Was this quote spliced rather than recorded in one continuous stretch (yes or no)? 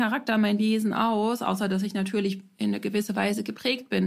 no